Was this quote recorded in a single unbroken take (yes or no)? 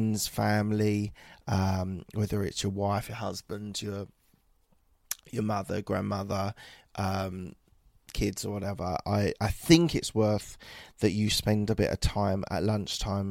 yes